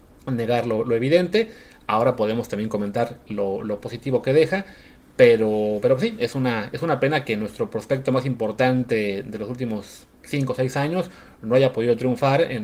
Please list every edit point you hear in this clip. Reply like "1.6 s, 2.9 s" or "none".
none

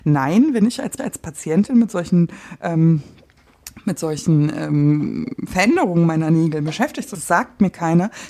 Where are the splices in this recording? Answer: 1.0 s, 7.1 s

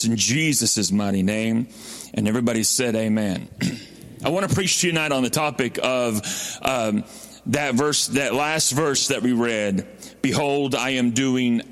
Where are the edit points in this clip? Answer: none

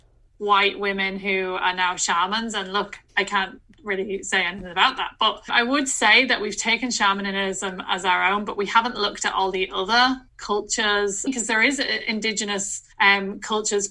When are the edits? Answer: 3.1 s, 10.3 s, 12.9 s

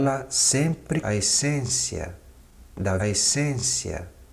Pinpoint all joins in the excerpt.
1.0 s, 3.0 s

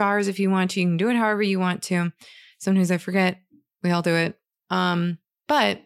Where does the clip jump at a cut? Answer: none

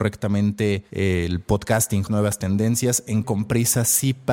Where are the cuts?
2.1 s, 3.2 s

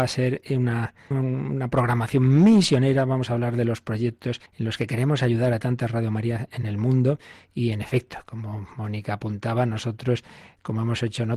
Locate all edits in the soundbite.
1.1 s, 4.5 s

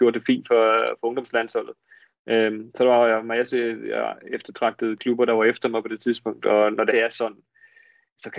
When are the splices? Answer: 6.9 s

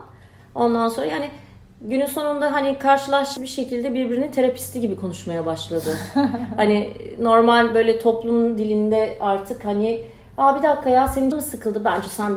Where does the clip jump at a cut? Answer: 3.4 s, 11.3 s

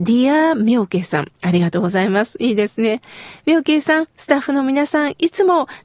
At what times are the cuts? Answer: 1.4 s

